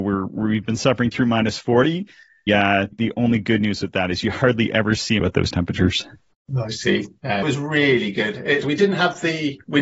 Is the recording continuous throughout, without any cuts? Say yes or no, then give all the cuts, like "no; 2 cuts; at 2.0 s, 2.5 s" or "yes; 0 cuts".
no; 5 cuts; at 2.5 s, 2.9 s, 5.2 s, 7.4 s, 8.6 s